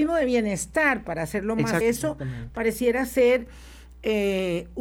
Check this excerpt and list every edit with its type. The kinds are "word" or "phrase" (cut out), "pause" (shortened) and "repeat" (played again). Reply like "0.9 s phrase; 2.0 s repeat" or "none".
1.8 s phrase